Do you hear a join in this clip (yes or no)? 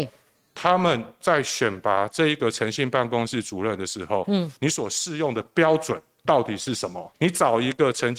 yes